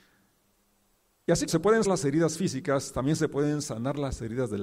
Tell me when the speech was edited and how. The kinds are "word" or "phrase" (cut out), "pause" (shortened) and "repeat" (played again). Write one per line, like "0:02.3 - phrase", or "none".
0:01.5 - word
0:01.8 - word

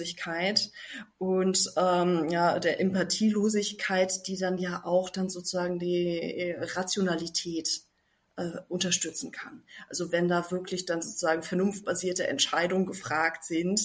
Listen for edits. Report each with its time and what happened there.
none

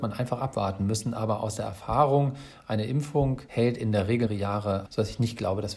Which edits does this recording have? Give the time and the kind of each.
0:04.3 - word
0:04.9 - word

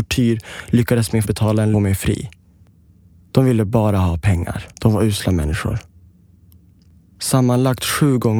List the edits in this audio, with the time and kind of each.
0:01.2 - word
0:01.7 - phrase
0:04.7 - pause

